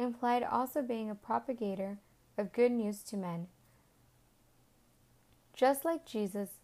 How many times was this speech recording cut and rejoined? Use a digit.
0